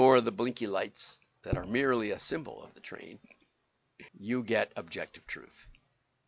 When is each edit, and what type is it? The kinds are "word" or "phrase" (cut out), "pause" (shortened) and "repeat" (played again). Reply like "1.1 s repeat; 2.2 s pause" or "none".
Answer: 4.1 s pause